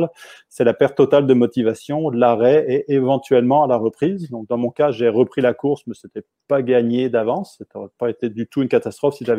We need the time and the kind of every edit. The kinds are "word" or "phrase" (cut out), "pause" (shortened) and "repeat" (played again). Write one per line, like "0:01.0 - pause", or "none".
none